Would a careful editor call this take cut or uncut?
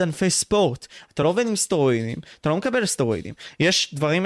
uncut